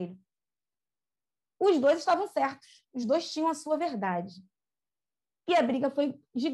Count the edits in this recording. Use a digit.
0